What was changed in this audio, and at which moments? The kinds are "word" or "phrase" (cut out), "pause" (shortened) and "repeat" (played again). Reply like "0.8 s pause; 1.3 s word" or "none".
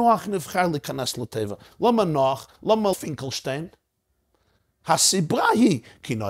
2.9 s word